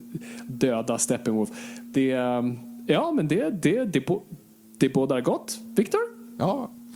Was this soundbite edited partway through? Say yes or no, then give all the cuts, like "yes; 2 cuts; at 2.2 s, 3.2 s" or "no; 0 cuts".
no; 0 cuts